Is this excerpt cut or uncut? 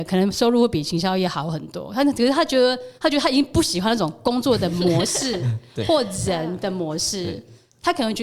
cut